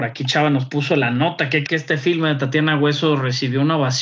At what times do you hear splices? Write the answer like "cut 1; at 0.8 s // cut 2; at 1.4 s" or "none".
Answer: cut 1; at 1.7 s

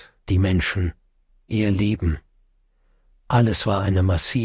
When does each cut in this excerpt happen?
cut 1; at 1.3 s

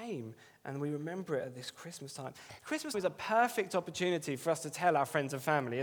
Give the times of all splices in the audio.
cut 1; at 2.9 s

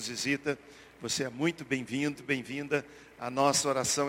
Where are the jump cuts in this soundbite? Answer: cut 1; at 2.2 s

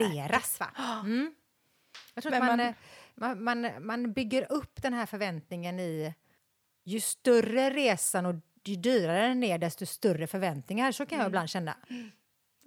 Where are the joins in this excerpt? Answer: cut 1; at 6.4 s

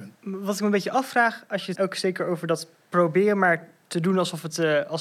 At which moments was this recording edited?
cut 1; at 1.7 s

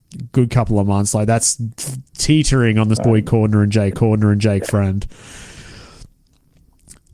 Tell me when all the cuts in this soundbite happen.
cut 1; at 2.1 s // cut 2; at 3.0 s // cut 3; at 3.9 s

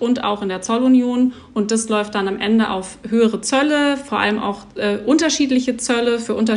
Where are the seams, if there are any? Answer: none

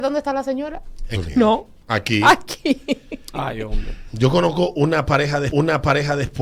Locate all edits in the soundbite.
cut 1; at 1.1 s // cut 2; at 5.5 s

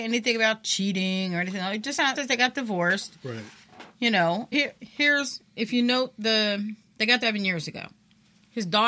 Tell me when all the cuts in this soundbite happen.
cut 1; at 2.2 s // cut 2; at 4.5 s // cut 3; at 7.2 s

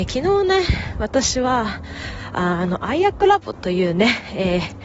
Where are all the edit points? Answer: none

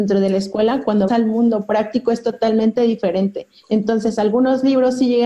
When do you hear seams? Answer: cut 1; at 1.1 s // cut 2; at 3.6 s

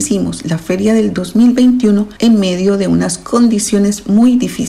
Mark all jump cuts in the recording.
cut 1; at 2.2 s

